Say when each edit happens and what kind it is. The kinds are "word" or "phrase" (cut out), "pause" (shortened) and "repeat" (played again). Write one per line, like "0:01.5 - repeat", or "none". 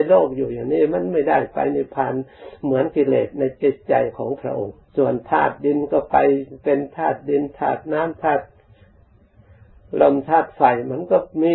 0:04.9 - pause